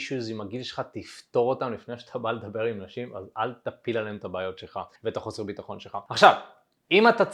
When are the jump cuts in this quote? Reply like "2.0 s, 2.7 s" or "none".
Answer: 5.0 s